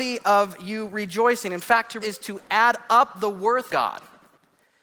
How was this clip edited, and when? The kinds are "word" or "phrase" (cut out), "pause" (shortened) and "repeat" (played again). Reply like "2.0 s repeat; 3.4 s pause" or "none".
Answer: 2.0 s word; 3.7 s word